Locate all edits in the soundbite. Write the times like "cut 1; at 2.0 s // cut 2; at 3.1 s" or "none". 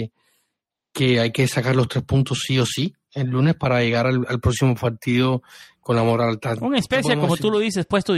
none